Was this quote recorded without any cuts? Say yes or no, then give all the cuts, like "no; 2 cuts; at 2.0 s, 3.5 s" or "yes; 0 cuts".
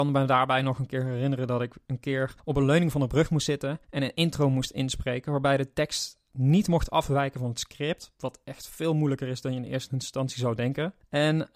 no; 2 cuts; at 2.4 s, 3.8 s